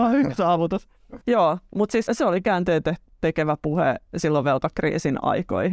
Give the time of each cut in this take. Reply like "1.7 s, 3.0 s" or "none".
1.2 s, 2.1 s